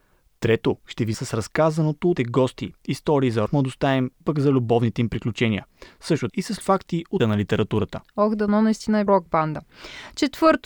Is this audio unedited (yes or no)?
no